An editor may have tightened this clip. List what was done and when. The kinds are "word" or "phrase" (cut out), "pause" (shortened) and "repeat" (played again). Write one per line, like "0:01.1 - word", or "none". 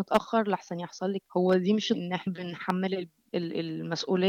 0:01.3 - word
0:01.9 - word
0:02.3 - word
0:03.3 - word